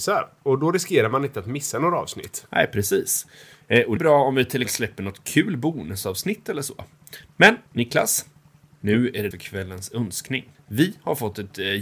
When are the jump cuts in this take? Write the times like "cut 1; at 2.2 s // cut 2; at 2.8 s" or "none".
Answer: cut 1; at 4.0 s // cut 2; at 4.6 s // cut 3; at 7.7 s // cut 4; at 9.3 s // cut 5; at 10.5 s